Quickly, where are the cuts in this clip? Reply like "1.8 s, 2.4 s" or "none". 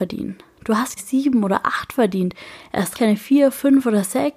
1.0 s, 2.9 s